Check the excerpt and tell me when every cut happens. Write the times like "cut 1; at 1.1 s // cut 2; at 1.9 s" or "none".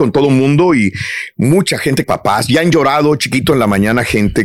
cut 1; at 2.0 s